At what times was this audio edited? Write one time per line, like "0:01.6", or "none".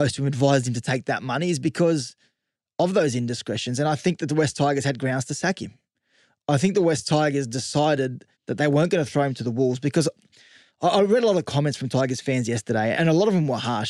0:08.3
0:12.9